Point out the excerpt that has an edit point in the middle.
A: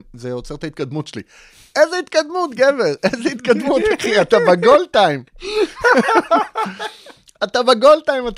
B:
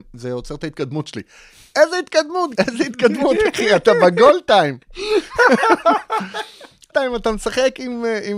B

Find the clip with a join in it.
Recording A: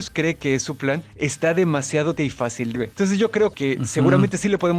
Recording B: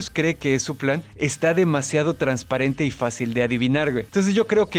A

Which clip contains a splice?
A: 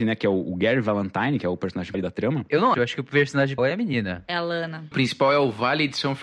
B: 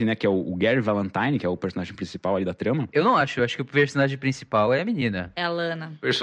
A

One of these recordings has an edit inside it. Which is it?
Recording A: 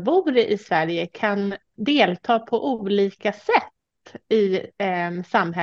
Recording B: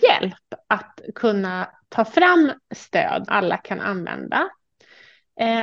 B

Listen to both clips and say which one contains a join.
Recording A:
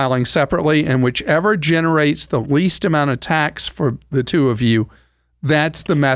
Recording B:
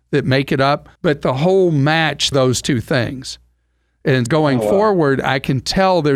B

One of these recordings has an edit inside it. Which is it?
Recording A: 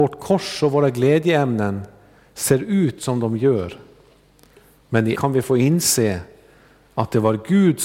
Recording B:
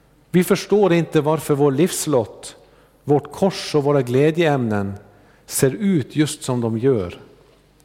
A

